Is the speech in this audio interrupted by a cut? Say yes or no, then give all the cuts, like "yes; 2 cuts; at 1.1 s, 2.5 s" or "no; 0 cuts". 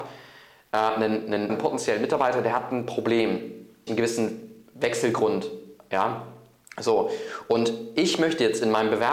yes; 2 cuts; at 1.5 s, 3.9 s